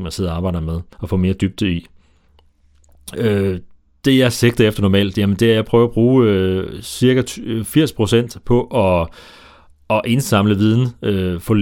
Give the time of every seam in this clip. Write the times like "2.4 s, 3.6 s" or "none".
0.9 s